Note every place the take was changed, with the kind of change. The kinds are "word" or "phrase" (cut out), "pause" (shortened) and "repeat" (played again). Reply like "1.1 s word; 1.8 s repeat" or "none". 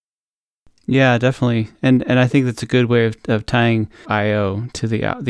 4.0 s phrase